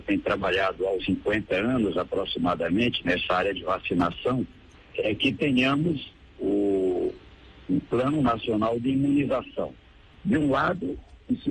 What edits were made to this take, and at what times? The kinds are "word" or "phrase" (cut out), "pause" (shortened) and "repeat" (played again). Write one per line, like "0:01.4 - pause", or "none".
0:01.0 - phrase
0:04.7 - pause
0:07.9 - word